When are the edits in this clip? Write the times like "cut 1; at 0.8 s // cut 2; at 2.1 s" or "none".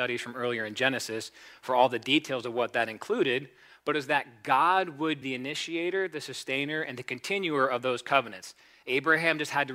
cut 1; at 5.2 s